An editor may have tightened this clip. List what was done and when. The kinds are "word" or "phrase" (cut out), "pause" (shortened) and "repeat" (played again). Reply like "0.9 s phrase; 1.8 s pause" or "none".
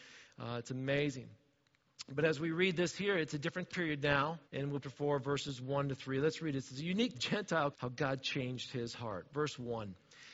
3.7 s word; 4.5 s pause; 4.8 s phrase; 7.1 s phrase; 7.7 s word